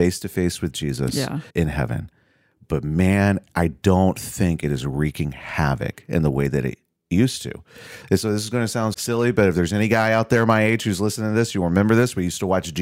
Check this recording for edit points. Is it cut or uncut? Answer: cut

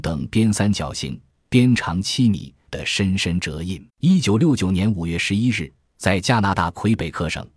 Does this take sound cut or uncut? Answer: cut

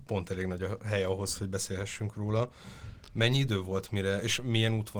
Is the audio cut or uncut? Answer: uncut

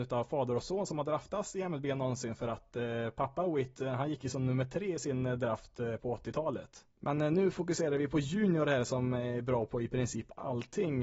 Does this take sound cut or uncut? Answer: uncut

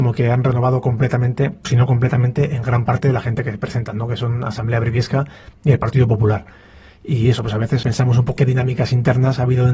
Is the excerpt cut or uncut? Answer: cut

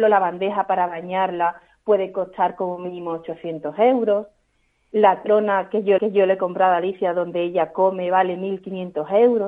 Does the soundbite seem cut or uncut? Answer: cut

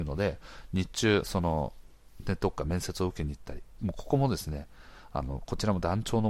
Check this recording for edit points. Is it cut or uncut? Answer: cut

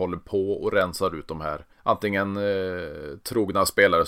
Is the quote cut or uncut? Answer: cut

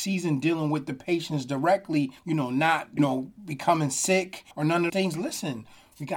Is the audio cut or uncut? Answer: cut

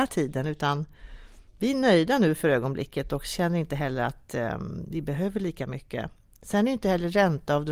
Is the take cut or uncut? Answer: uncut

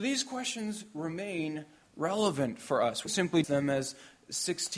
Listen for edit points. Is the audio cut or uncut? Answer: cut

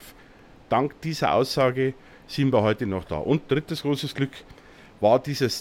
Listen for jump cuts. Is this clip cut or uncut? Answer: uncut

